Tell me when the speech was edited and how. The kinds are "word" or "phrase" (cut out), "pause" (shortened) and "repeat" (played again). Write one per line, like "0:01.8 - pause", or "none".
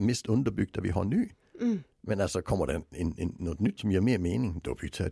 0:03.8 - word